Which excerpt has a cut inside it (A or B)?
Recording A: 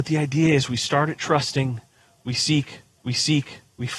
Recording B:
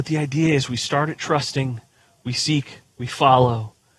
A